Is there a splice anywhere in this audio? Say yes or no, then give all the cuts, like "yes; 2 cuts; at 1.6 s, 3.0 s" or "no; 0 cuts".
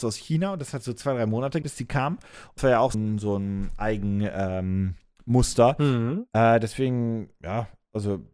yes; 3 cuts; at 1.6 s, 2.6 s, 2.9 s